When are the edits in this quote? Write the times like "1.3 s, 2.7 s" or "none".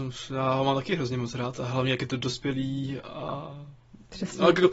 none

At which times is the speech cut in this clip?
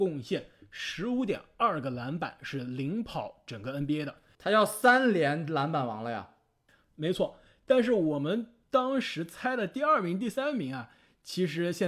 none

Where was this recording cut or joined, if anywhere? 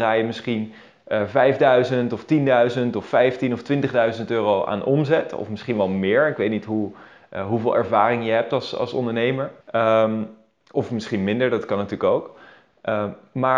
9.6 s

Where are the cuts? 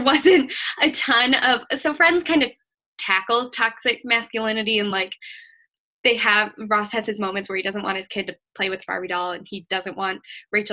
none

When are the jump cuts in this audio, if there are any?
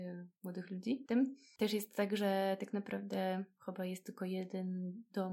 1.1 s

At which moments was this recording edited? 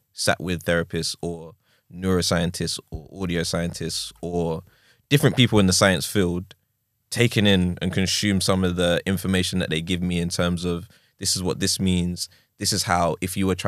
none

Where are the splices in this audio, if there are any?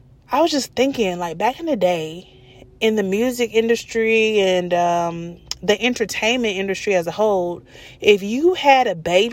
none

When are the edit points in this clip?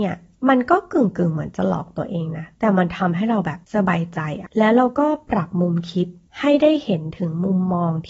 3.6 s

